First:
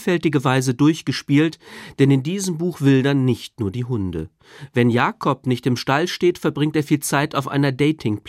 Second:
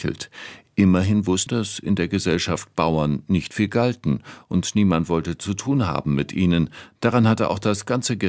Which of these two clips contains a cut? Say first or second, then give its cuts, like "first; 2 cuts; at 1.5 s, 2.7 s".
second; 1 cut; at 1.5 s